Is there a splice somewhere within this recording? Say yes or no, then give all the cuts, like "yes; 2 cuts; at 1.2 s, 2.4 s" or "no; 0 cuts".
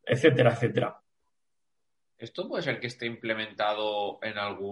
no; 0 cuts